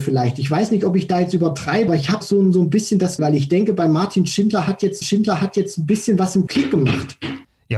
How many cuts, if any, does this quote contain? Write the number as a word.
five